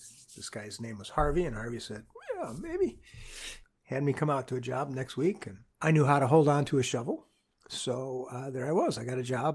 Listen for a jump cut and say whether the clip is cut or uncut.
cut